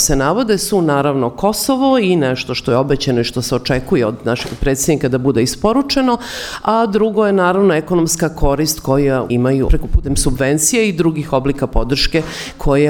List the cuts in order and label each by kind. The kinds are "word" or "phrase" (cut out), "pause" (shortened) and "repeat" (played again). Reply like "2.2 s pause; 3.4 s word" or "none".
9.3 s phrase; 9.7 s word